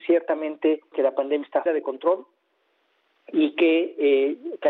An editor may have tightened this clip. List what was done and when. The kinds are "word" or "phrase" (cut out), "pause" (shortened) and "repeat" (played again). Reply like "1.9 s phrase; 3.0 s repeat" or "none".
0.9 s word; 1.7 s word